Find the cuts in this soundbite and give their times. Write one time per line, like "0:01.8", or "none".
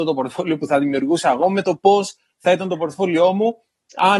none